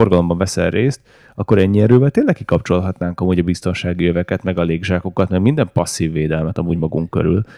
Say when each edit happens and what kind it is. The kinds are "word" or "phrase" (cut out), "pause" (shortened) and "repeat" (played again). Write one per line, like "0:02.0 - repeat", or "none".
none